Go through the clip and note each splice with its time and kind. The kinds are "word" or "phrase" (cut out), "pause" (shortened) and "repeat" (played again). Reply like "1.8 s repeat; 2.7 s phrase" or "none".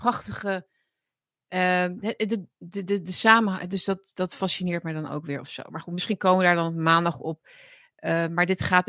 none